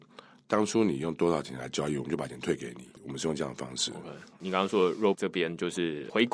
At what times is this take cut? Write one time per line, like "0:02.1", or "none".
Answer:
0:05.1